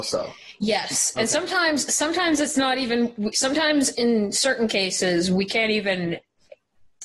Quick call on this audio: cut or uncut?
uncut